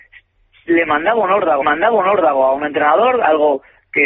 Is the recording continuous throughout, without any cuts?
no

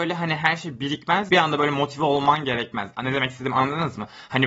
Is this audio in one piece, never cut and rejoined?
no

